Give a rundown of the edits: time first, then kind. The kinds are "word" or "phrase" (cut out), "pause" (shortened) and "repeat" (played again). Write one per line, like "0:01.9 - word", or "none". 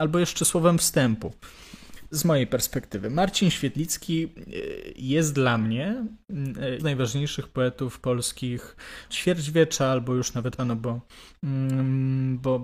0:02.1 - word
0:06.8 - word
0:09.1 - word
0:10.6 - word